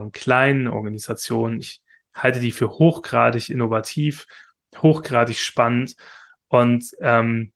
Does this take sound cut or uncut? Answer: uncut